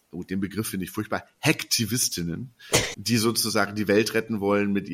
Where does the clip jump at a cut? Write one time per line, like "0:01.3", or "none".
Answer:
0:02.9